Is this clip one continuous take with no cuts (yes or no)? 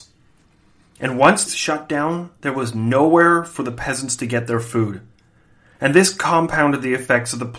no